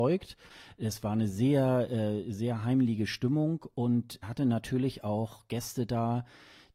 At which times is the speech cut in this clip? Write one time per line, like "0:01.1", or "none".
0:04.2